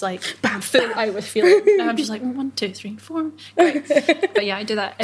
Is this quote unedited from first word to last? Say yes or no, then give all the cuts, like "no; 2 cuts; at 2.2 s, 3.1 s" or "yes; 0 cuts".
yes; 0 cuts